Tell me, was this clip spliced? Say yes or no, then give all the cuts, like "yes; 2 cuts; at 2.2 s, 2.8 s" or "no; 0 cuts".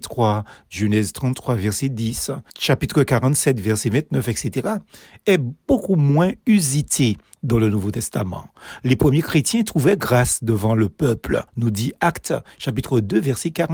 yes; 2 cuts; at 2.5 s, 11.5 s